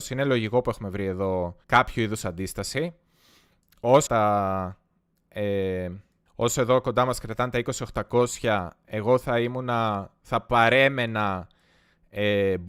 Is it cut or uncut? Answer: cut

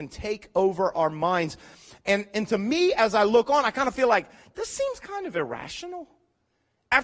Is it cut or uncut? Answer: uncut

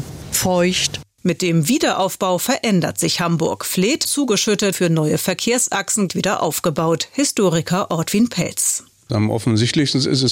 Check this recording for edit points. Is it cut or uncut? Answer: cut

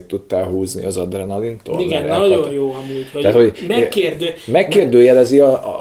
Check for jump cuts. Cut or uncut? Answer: uncut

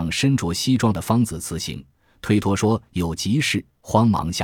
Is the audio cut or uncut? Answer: uncut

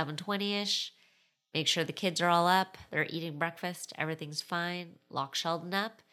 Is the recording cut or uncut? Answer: uncut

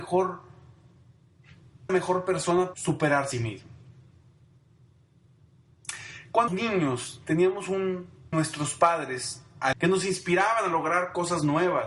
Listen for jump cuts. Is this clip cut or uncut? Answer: cut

